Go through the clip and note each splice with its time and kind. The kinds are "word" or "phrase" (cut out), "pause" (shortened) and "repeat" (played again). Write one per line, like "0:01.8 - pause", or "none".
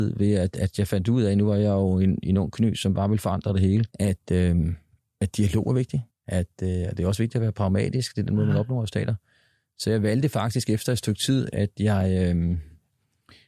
0:03.9 - pause
0:06.1 - pause